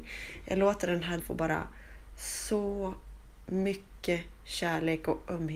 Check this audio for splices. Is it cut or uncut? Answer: cut